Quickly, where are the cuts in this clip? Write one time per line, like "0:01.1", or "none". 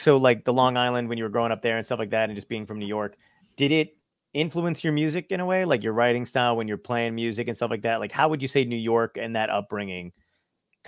none